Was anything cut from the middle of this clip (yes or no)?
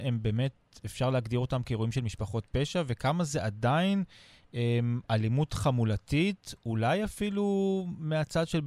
no